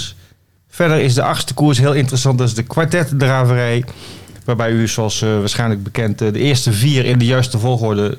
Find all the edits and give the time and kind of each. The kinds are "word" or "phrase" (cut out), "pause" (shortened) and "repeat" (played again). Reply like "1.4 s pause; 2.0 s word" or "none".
none